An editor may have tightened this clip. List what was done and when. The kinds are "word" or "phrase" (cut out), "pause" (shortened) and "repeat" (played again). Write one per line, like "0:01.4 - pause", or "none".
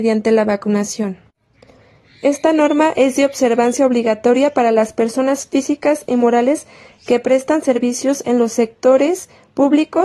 none

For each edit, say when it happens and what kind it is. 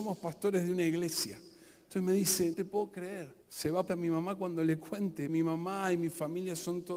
0:02.5 - word
0:03.4 - pause
0:03.9 - phrase
0:05.3 - word

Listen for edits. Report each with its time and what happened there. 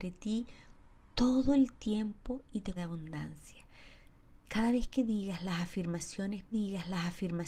0:02.8 - word
0:06.5 - repeat

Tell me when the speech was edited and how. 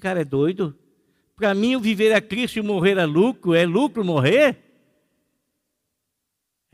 none

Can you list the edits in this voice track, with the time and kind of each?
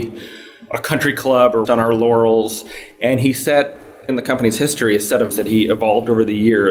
0:01.6 - word
0:04.1 - word
0:05.3 - word

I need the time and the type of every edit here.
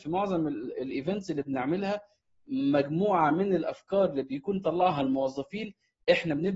none

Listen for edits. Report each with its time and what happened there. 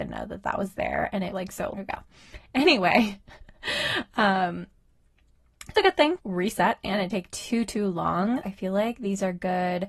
0:01.3 - word
0:01.7 - word
0:05.7 - word
0:06.2 - word
0:07.1 - word
0:08.4 - word

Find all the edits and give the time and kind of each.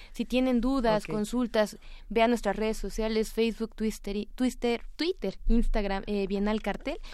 none

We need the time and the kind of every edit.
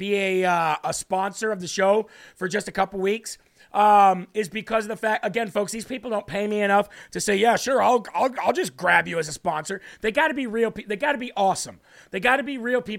none

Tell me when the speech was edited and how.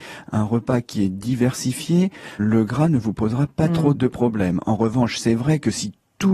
0:02.4 - word
0:03.9 - word

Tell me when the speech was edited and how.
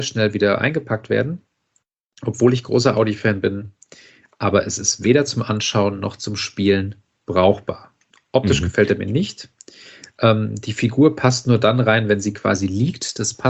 none

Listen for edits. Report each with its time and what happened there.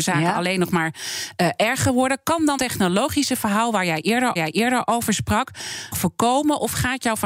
0:02.6 - word
0:04.4 - repeat
0:05.9 - phrase

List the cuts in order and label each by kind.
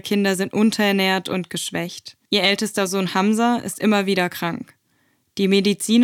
0:02.2 - pause

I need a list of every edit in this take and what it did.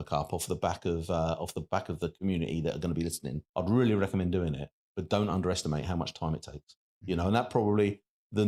0:03.5 - pause

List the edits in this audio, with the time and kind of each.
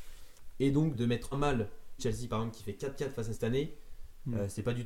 0:00.9 - word
0:01.3 - word
0:02.0 - word
0:03.3 - word

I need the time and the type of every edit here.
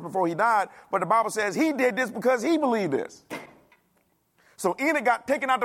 none

